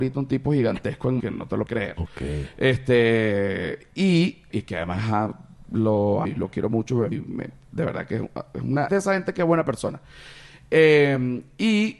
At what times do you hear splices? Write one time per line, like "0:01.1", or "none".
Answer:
0:01.2
0:01.7
0:04.5
0:06.2
0:07.1
0:08.9